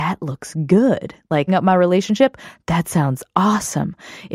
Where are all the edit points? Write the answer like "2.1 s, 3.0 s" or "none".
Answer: 1.5 s